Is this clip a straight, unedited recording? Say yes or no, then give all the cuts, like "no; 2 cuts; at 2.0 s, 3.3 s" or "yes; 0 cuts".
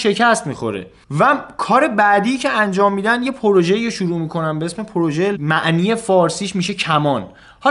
no; 1 cut; at 5.3 s